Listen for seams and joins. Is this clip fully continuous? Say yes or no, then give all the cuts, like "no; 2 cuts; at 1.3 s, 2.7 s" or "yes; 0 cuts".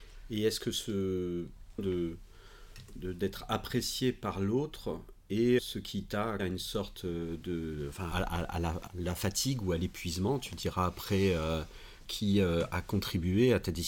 no; 6 cuts; at 1.8 s, 5.6 s, 6.4 s, 8.1 s, 8.9 s, 12.0 s